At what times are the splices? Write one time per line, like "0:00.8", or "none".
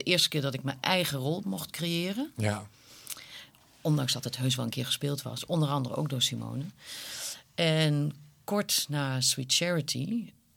none